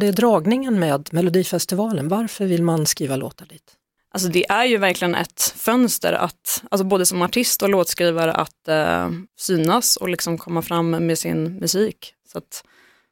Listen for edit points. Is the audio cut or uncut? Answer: cut